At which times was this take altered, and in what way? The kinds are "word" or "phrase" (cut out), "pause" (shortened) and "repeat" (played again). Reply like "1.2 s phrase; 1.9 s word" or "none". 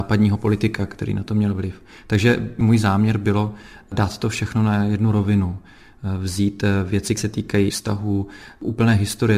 2.6 s word; 7.2 s word; 7.7 s word